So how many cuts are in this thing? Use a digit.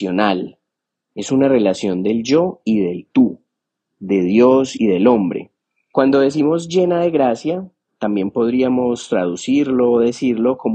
0